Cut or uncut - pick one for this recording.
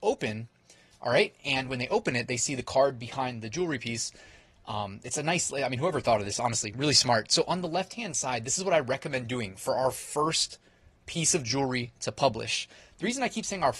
uncut